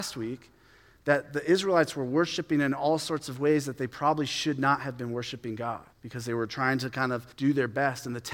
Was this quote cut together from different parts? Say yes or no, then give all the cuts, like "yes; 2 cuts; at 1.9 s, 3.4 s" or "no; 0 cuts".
yes; 2 cuts; at 5.9 s, 7.3 s